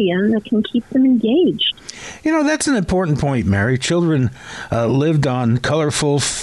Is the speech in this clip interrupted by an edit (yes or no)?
no